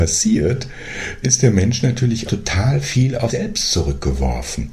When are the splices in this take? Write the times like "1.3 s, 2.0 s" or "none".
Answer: 1.2 s, 2.3 s, 3.3 s